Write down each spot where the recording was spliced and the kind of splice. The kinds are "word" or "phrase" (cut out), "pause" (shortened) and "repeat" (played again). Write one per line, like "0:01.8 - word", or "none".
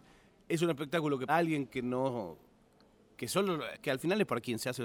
0:01.3 - word
0:03.7 - word